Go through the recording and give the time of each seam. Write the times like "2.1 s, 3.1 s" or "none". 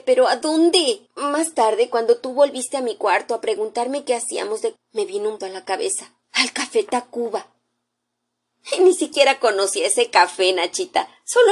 1.1 s, 4.8 s, 5.4 s, 6.2 s